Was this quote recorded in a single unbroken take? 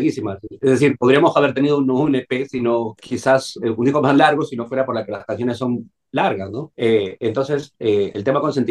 yes; 0 cuts

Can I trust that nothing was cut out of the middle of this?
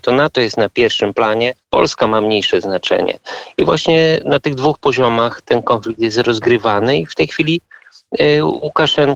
no; 1 cut; at 1.6 s

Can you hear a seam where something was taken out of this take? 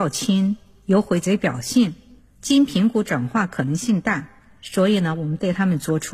no; 0 cuts

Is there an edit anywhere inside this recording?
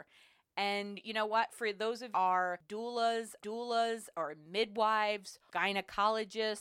yes; 2 cuts; at 2.1 s, 3.4 s

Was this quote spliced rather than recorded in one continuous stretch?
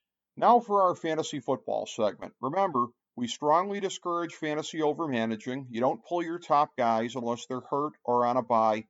no; 0 cuts

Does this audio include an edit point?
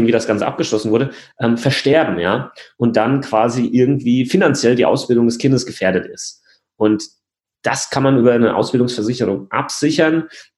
no; 0 cuts

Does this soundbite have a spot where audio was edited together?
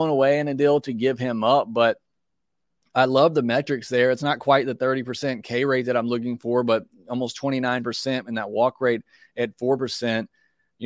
no; 0 cuts

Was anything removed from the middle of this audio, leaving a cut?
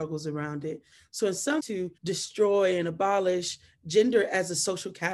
yes; 2 cuts; at 1.6 s, 2.0 s

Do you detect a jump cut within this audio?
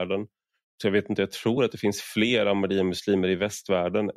no; 0 cuts

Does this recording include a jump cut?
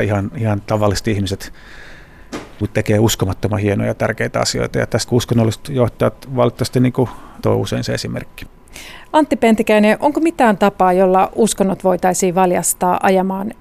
yes; 3 cuts; at 2.6 s, 5.1 s, 7.4 s

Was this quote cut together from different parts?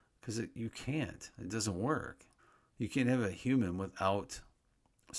yes; 1 cut; at 2.4 s

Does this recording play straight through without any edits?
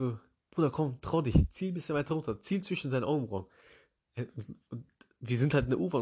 yes; 0 cuts

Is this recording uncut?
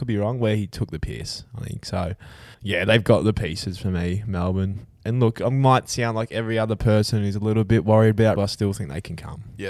no; 2 cuts; at 2.5 s, 8.4 s

